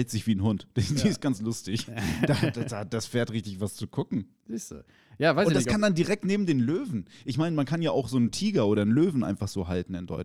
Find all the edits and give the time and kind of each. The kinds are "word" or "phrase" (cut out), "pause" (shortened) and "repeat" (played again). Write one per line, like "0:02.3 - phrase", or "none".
none